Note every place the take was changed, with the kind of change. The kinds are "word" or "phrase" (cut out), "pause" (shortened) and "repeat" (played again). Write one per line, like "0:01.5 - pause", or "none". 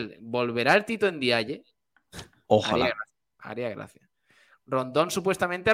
none